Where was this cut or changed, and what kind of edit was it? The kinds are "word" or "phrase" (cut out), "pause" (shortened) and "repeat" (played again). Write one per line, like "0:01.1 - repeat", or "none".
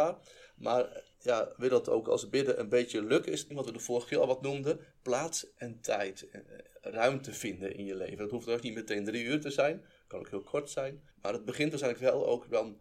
0:01.1 - pause
0:03.5 - word
0:11.1 - pause